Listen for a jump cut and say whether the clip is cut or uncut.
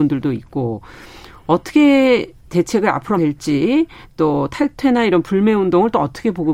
cut